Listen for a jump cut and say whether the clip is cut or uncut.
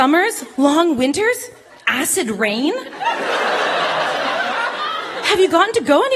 uncut